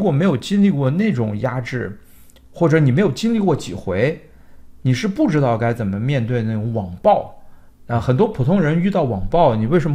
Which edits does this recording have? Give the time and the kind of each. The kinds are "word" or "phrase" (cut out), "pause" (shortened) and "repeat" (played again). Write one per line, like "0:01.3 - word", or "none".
none